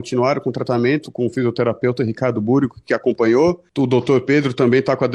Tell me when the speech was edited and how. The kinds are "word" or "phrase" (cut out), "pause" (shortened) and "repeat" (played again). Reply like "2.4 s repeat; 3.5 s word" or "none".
3.7 s pause